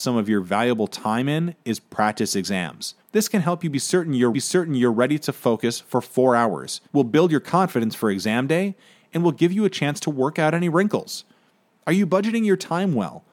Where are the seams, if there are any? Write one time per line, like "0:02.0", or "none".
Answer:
0:03.0
0:04.3
0:06.9